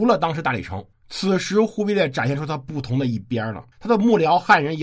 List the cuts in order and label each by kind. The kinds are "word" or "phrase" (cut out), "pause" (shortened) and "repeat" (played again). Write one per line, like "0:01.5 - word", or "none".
0:00.9 - pause
0:03.7 - pause

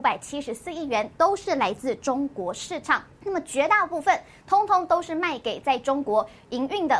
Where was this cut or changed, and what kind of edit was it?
0:03.1 - pause

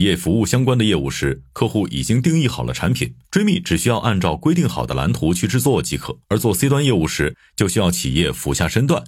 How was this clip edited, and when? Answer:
0:03.2 - pause
0:06.2 - pause

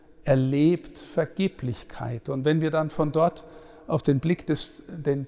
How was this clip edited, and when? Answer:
none

